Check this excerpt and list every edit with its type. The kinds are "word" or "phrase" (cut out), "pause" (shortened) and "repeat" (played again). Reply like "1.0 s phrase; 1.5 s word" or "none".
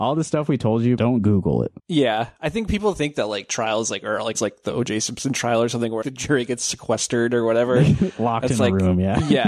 1.0 s phrase; 1.8 s pause; 4.3 s word; 6.0 s word